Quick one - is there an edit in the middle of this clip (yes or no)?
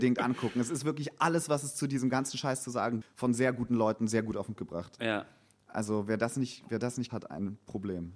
yes